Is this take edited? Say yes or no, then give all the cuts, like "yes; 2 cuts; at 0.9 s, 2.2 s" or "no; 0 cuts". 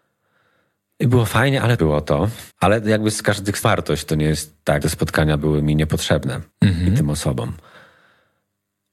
yes; 5 cuts; at 1.8 s, 2.5 s, 3.6 s, 4.8 s, 6.5 s